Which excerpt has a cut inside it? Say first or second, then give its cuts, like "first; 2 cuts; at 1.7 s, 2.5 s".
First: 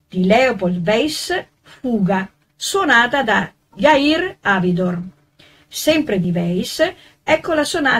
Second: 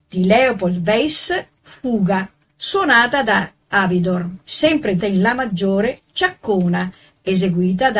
second; 3 cuts; at 3.7 s, 4.4 s, 5.0 s